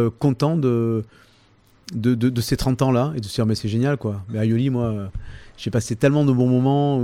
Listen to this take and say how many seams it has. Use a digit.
0